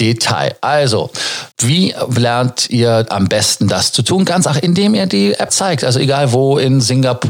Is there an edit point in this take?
yes; 3 cuts; at 1.5 s, 4.5 s, 5.5 s

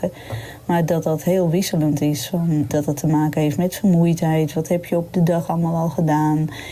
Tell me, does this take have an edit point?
no; 0 cuts

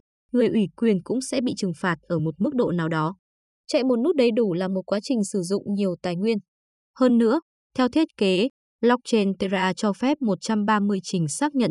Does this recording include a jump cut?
no; 0 cuts

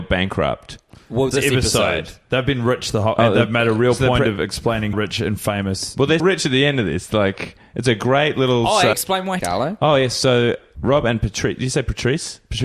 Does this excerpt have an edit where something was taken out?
yes; 6 cuts; at 1.3 s, 4.9 s, 6.2 s, 8.9 s, 9.4 s, 10.7 s

